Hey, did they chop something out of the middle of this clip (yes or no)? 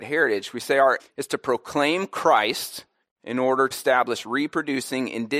yes